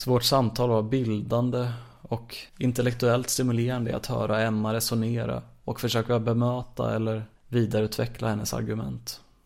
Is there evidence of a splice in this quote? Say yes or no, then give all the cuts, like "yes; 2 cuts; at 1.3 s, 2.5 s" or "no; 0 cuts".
yes; 2 cuts; at 2.5 s, 7.4 s